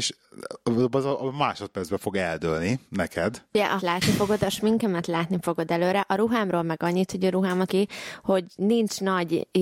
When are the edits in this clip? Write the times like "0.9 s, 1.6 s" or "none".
2.9 s, 3.8 s, 7.7 s